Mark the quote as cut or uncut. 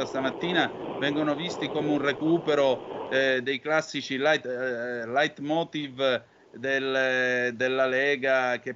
uncut